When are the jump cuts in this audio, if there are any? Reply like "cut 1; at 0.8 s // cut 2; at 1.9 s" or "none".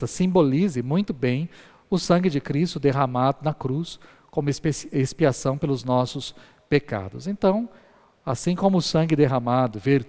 none